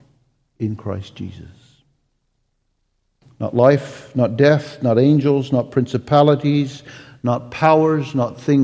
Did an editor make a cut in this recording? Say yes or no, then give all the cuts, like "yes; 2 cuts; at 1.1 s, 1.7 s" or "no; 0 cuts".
no; 0 cuts